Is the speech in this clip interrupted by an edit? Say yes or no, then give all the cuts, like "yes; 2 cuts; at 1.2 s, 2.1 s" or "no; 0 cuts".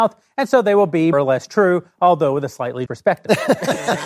yes; 2 cuts; at 1.1 s, 2.9 s